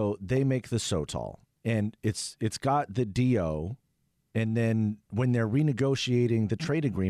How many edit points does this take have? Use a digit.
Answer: 0